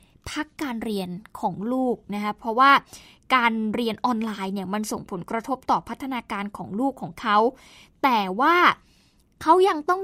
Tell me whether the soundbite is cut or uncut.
uncut